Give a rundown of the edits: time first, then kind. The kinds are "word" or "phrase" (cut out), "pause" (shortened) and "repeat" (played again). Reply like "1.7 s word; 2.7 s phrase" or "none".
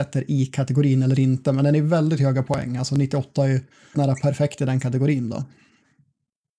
3.9 s word